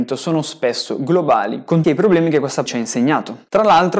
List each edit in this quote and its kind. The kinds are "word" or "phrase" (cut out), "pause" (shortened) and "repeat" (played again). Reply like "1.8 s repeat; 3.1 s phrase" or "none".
1.8 s phrase; 2.7 s word